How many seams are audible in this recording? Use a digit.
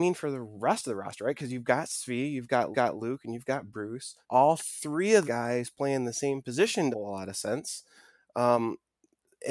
4